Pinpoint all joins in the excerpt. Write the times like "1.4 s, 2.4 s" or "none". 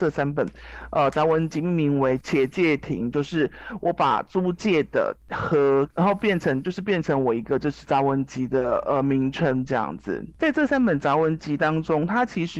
5.9 s